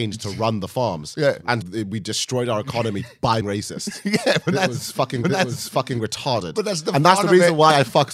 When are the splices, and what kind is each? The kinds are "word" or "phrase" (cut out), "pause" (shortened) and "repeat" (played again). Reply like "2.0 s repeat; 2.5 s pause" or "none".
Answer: 1.6 s word; 3.4 s word; 5.2 s repeat